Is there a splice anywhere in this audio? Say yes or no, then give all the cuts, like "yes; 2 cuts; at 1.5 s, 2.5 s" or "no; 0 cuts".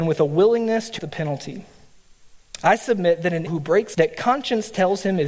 yes; 3 cuts; at 1.0 s, 3.5 s, 3.9 s